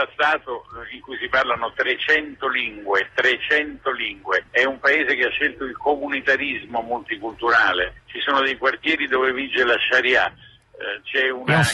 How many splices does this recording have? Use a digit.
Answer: 2